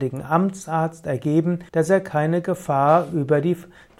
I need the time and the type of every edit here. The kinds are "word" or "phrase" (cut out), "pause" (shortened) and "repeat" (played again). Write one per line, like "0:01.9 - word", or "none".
0:01.7 - pause